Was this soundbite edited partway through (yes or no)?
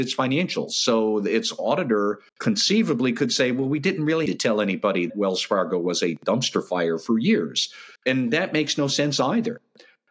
yes